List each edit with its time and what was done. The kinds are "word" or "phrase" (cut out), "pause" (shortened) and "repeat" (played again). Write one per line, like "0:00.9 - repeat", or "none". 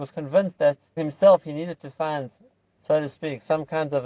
0:01.0 - word